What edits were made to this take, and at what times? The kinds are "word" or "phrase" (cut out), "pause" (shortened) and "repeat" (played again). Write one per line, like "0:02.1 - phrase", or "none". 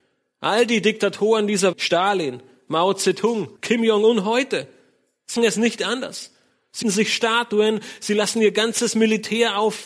0:01.7 - phrase
0:03.6 - pause
0:05.4 - word
0:06.8 - word